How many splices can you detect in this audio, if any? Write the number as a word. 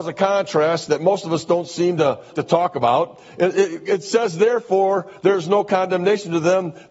one